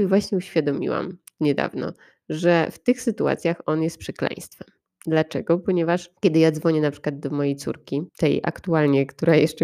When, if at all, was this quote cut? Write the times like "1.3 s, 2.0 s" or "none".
6.2 s, 8.1 s